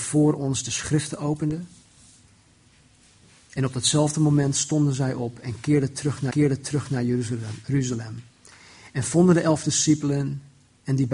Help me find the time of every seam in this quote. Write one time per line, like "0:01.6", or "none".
0:06.3